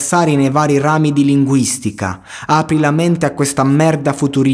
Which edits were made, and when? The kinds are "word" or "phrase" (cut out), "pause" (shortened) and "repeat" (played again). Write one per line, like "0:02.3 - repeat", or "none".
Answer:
none